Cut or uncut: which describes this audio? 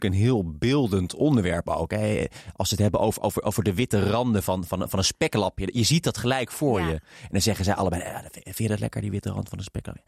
uncut